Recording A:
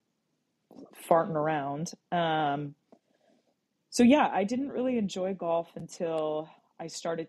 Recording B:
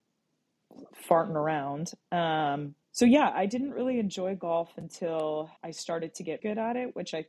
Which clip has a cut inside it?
B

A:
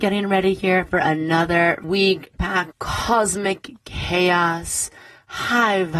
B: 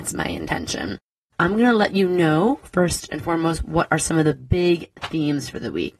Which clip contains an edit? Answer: A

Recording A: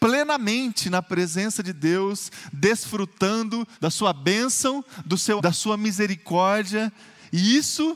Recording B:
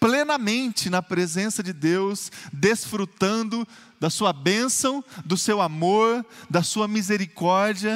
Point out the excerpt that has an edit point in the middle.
A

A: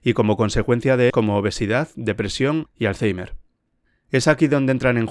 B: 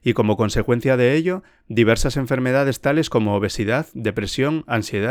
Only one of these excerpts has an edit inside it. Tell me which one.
A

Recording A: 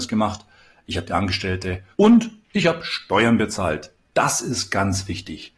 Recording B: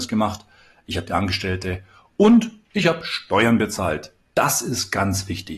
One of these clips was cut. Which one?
A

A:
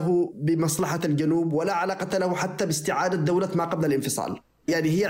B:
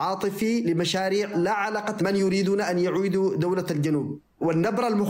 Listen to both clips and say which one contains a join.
B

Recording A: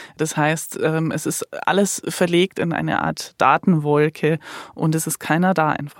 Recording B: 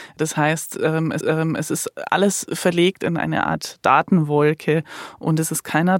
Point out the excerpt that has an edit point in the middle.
B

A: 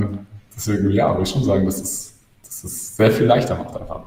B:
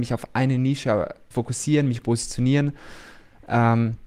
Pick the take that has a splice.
B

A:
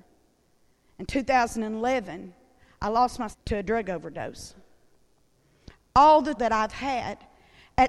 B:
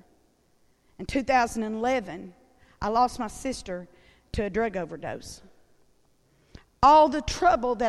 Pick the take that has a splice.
A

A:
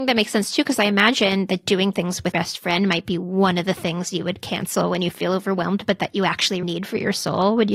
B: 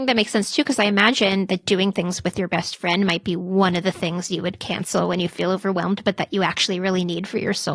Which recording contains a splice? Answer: A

